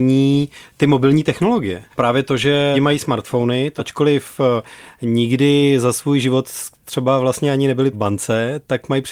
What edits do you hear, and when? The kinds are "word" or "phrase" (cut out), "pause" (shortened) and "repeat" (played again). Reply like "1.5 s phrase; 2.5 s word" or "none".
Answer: 1.9 s pause; 2.7 s word; 3.8 s word; 7.9 s word